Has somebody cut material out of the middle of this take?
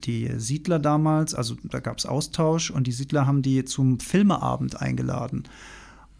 no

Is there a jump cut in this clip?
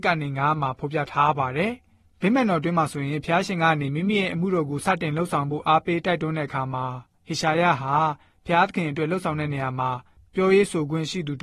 no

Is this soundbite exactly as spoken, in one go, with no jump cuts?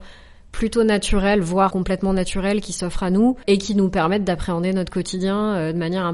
no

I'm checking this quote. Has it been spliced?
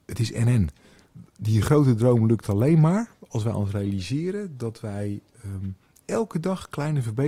no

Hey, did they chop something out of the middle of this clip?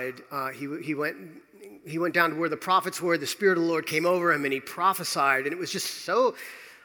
no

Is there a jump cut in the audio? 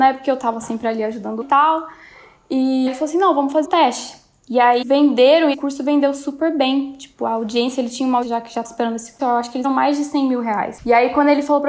yes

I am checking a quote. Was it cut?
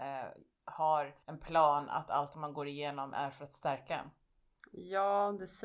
yes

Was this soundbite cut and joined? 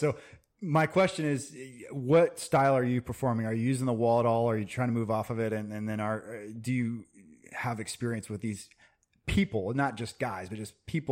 no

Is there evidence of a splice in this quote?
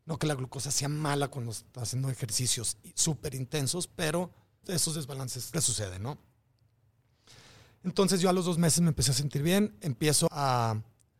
yes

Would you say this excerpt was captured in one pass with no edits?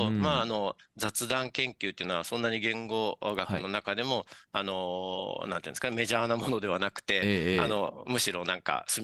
yes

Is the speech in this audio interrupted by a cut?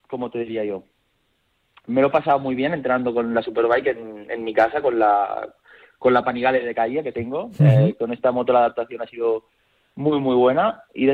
no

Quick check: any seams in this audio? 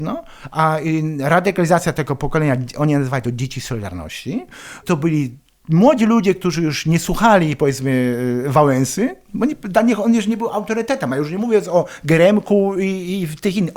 no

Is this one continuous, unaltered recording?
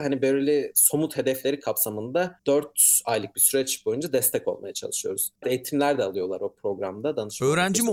no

